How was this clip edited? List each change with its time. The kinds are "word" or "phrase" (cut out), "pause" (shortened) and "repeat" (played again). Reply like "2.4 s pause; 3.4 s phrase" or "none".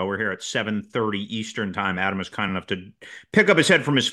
none